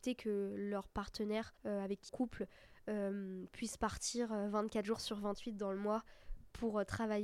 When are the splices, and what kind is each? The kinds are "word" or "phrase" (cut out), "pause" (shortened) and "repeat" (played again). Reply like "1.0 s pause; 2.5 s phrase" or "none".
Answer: 1.6 s pause; 2.1 s phrase